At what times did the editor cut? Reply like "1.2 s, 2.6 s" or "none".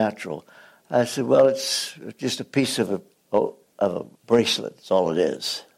3.1 s, 4.1 s